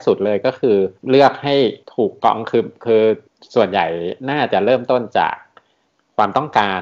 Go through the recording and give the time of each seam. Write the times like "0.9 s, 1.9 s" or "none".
1.0 s, 1.8 s, 3.3 s